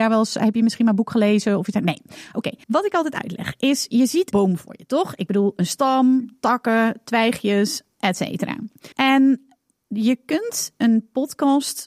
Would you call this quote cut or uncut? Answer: cut